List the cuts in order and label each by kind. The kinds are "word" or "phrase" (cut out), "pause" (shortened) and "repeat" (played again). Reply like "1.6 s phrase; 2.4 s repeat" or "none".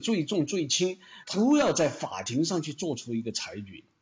1.2 s pause